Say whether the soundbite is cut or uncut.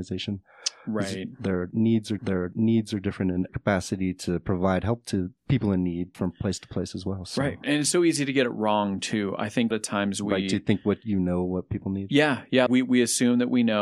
cut